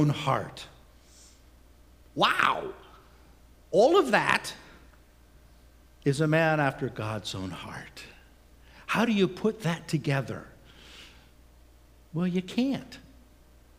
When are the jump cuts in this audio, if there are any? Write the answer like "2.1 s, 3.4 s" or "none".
none